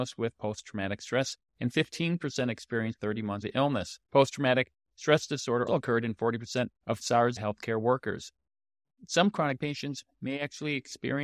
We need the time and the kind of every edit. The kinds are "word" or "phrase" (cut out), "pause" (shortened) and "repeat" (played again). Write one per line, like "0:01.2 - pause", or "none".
0:01.4 - word
0:03.0 - phrase
0:03.4 - word
0:04.0 - pause
0:05.7 - word
0:06.8 - pause
0:07.4 - word
0:09.6 - word